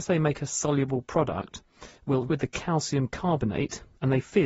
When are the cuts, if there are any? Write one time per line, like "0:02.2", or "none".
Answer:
0:02.3